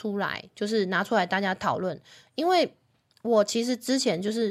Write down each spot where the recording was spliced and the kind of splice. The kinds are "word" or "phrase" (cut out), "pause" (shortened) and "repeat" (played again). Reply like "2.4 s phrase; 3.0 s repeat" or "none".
none